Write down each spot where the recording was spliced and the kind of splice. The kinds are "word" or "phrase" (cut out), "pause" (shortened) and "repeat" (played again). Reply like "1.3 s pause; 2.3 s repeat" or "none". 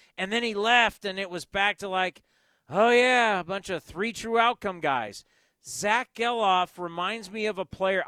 none